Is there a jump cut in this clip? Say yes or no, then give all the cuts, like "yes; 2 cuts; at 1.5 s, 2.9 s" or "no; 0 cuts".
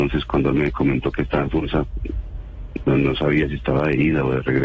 no; 0 cuts